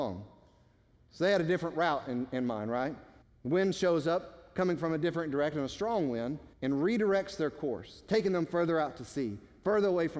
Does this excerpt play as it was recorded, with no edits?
no; 2 cuts; at 3.2 s, 6.5 s

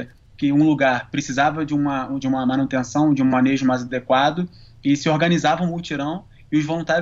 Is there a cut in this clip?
no; 0 cuts

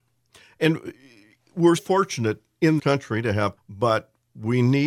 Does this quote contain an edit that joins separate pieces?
yes; 3 cuts; at 1.8 s, 2.8 s, 3.6 s

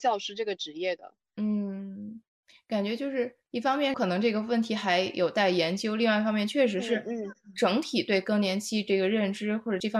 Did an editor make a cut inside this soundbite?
no; 0 cuts

